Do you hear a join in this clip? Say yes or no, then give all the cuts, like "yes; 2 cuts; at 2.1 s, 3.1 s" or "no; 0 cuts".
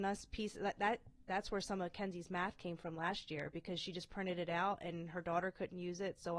no; 0 cuts